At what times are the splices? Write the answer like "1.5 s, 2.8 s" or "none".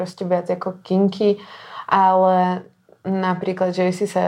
none